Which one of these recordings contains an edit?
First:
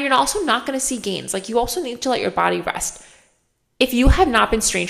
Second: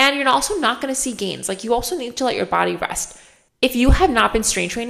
second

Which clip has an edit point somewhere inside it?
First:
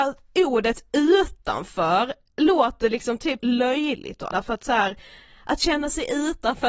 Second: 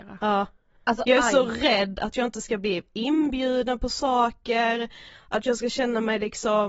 first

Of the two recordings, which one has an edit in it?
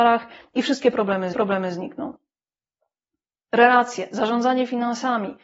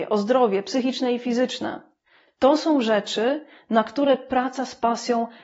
first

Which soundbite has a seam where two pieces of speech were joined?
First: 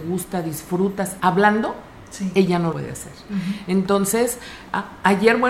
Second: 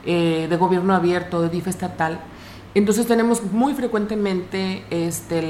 first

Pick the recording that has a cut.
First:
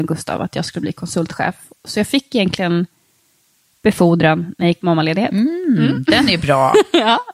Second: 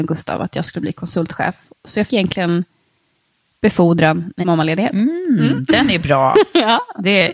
second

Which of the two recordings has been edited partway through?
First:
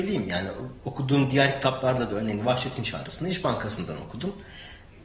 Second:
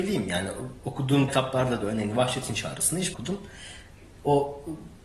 second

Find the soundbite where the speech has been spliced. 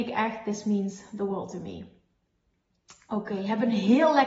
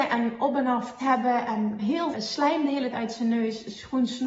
second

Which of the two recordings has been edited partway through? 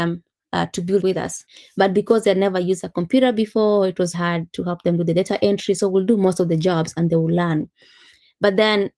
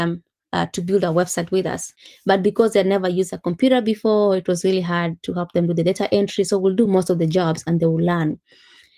first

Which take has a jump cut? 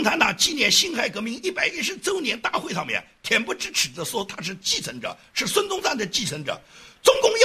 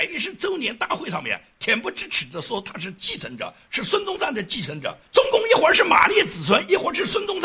second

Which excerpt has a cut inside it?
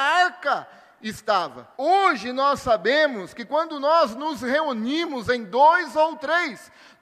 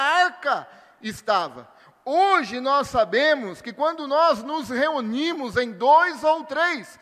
first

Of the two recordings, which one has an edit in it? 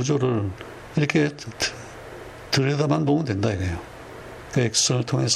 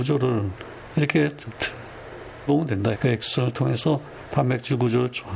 second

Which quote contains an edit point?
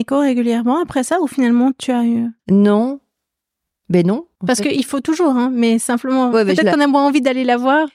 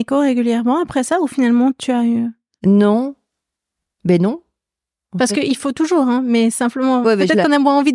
first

